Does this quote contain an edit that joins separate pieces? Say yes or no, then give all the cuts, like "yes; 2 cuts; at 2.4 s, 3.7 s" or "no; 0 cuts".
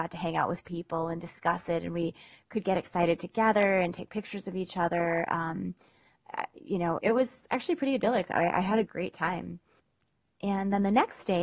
yes; 1 cut; at 7.0 s